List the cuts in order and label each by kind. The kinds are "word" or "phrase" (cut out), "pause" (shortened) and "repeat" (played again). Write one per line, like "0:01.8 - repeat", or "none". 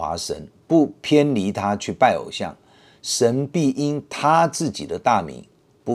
none

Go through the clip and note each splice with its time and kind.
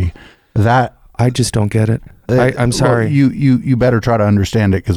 none

